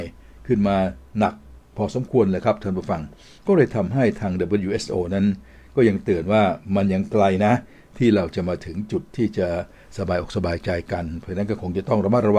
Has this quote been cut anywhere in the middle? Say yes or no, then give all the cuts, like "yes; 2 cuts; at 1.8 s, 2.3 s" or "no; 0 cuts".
no; 0 cuts